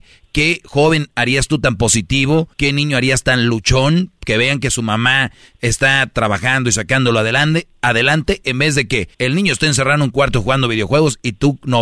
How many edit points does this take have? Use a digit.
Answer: 2